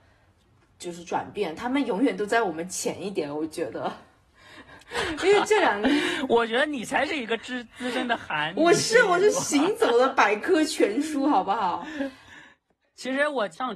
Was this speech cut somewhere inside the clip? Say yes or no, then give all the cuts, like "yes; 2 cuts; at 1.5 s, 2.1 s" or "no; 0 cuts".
no; 0 cuts